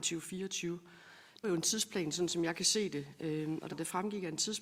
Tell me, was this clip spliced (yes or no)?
yes